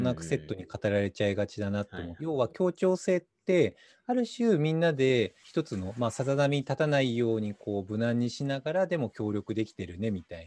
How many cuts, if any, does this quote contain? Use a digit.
2